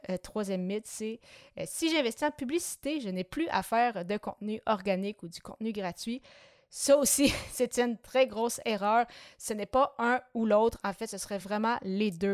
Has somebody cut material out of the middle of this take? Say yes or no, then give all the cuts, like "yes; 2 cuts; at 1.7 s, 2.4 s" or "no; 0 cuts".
no; 0 cuts